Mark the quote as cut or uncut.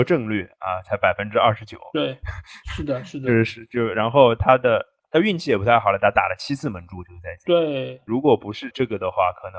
uncut